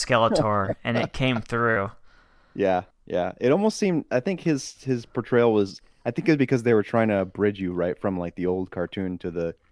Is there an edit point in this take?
yes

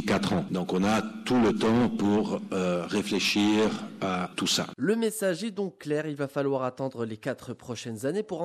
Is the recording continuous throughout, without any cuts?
yes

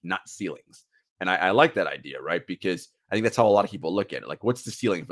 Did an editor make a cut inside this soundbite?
no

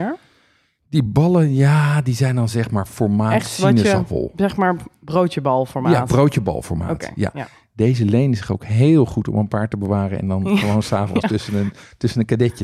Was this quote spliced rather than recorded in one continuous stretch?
no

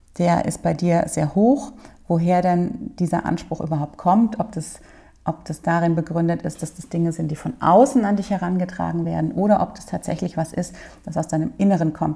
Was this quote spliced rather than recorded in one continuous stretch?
no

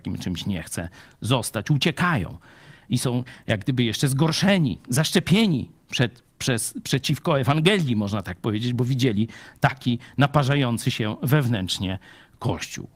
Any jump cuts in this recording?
no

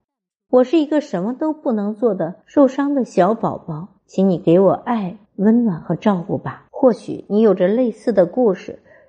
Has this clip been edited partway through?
yes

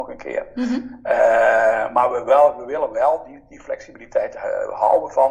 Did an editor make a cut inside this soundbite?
no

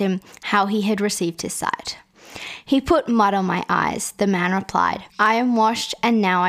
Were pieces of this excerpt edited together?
yes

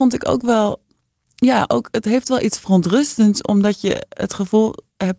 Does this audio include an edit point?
no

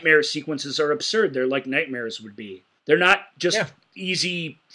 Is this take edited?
yes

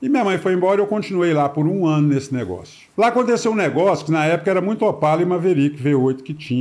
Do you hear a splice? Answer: yes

